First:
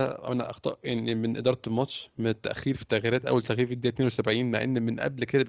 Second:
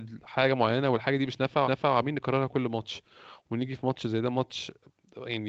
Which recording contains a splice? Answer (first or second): second